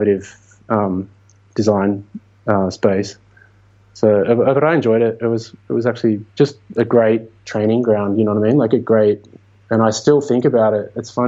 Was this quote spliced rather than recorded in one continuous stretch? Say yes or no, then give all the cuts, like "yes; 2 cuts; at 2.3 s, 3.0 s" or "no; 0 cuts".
yes; 2 cuts; at 6.3 s, 7.4 s